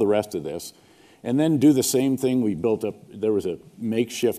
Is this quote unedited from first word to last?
yes; 0 cuts

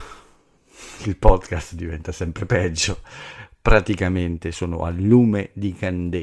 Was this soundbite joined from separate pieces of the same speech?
no; 0 cuts

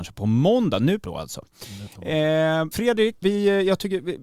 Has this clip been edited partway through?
yes; 3 cuts; at 1.0 s, 2.7 s, 3.2 s

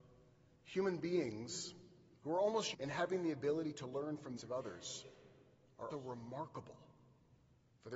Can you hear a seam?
yes; 3 cuts; at 2.7 s, 4.4 s, 5.9 s

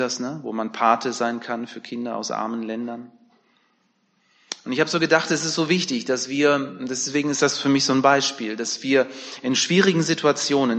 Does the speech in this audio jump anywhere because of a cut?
no; 0 cuts

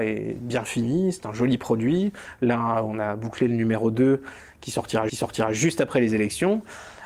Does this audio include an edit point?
yes; 1 cut; at 5.1 s

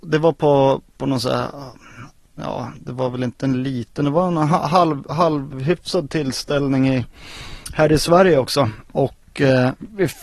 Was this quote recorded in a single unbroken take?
yes; 0 cuts

